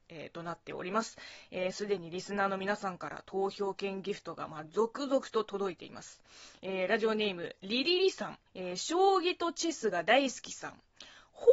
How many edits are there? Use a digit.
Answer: 1